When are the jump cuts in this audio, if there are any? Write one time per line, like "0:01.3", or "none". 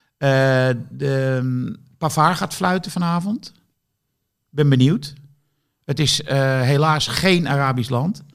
none